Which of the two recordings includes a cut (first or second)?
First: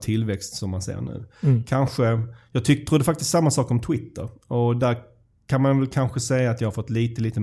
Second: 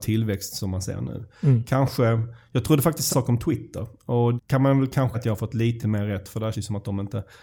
second